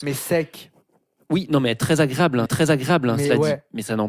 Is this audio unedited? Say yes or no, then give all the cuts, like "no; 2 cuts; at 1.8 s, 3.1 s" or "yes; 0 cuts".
no; 1 cut; at 2.5 s